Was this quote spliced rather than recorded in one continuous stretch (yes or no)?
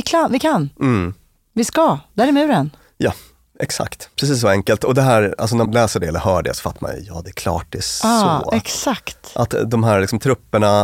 yes